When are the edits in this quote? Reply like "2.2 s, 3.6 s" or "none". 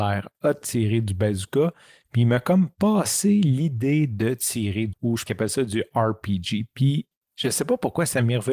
4.9 s, 5.3 s